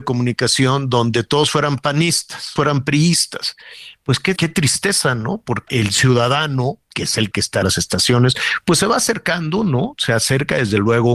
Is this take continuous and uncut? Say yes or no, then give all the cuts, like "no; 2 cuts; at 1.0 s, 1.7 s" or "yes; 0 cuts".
no; 6 cuts; at 2.6 s, 4.4 s, 5.7 s, 6.9 s, 7.3 s, 7.6 s